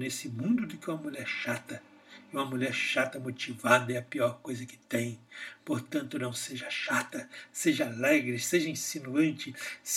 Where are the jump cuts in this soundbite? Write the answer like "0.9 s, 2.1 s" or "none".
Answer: none